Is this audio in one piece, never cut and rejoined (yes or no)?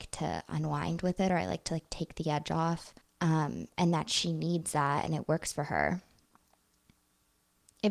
no